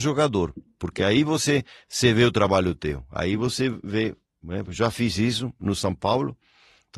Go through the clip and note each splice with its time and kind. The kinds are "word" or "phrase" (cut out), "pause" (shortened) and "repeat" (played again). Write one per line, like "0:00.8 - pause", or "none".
none

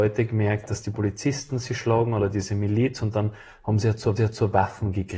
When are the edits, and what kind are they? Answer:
0:04.2 - repeat

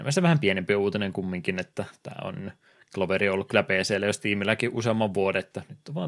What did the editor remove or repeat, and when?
none

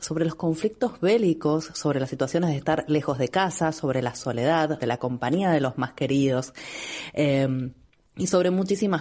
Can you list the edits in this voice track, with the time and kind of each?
0:04.8 - word

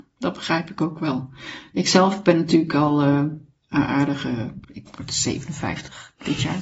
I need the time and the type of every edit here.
0:04.6 - pause

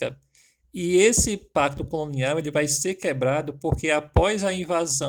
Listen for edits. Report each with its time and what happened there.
none

